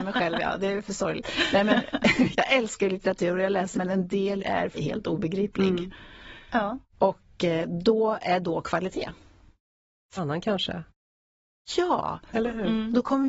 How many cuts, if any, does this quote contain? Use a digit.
6